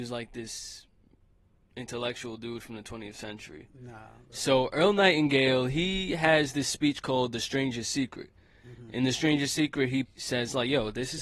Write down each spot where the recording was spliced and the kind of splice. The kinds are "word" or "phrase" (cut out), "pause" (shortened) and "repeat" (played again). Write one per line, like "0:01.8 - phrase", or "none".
0:10.0 - word